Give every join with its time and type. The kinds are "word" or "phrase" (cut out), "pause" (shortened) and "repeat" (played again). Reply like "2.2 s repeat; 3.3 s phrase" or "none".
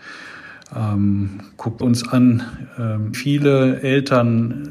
1.8 s word; 3.1 s word